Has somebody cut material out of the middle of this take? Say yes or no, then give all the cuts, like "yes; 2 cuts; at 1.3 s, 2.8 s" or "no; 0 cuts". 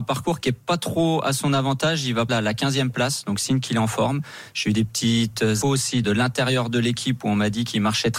yes; 3 cuts; at 2.3 s, 5.6 s, 6.0 s